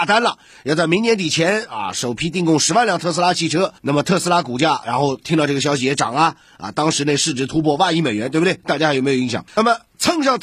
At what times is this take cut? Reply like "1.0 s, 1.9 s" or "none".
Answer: 3.8 s, 9.5 s